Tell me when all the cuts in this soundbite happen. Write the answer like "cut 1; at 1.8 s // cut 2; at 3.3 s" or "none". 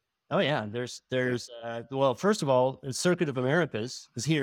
none